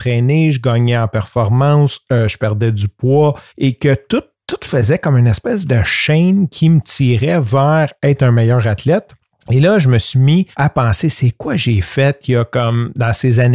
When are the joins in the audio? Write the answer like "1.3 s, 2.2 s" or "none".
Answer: 3.5 s, 9.2 s, 10.5 s

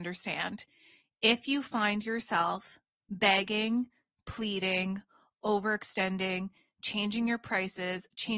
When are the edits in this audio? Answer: none

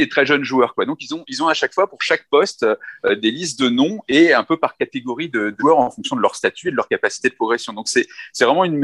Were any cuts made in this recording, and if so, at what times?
5.6 s

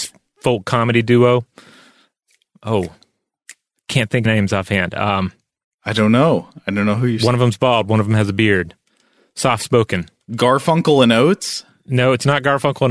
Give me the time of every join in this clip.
4.3 s

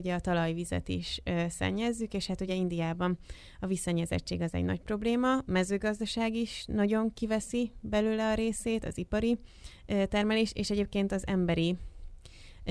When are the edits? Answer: none

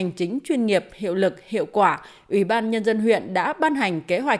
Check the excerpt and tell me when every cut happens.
none

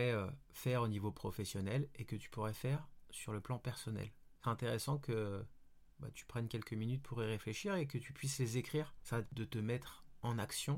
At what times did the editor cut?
4.4 s, 6.1 s, 9.3 s

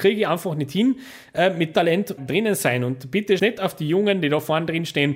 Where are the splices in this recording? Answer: 1.7 s, 2.2 s, 3.4 s

